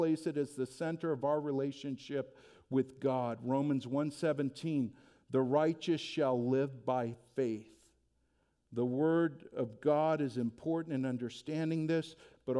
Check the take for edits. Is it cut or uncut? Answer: uncut